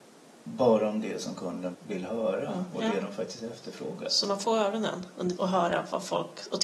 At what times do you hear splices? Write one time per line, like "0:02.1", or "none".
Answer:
0:01.7
0:04.4
0:05.4